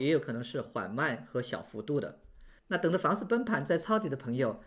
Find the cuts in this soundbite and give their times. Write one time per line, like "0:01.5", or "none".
0:02.6